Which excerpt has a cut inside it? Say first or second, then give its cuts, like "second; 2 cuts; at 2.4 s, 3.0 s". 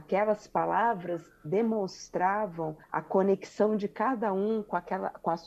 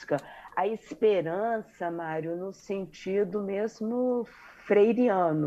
first; 1 cut; at 2.8 s